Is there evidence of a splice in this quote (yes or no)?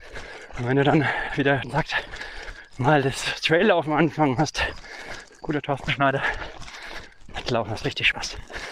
yes